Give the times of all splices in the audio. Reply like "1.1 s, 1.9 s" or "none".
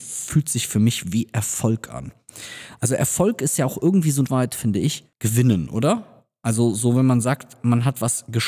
4.3 s, 5.1 s